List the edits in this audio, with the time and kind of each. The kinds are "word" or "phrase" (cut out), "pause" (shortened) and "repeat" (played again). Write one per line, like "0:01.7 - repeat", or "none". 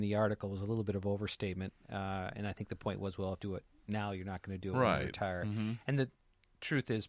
0:03.4 - phrase